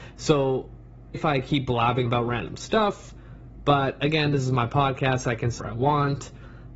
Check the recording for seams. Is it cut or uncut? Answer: cut